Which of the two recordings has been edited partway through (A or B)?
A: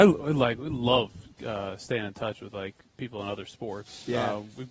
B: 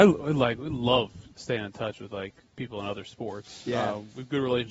B